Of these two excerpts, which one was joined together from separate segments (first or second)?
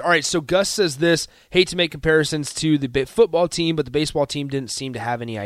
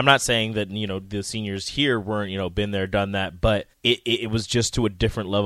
second